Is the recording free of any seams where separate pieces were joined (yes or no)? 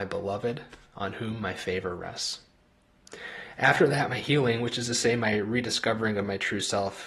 yes